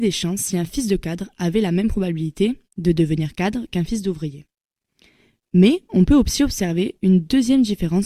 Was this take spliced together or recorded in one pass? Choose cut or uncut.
uncut